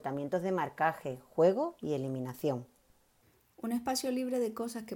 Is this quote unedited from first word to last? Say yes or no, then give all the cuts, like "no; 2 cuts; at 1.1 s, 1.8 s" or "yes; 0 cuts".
yes; 0 cuts